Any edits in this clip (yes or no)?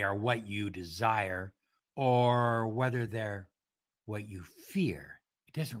no